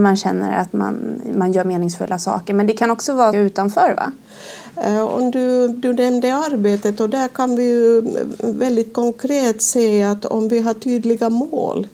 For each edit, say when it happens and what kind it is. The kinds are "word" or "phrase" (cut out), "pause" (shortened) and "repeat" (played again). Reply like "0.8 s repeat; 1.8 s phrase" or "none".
3.3 s word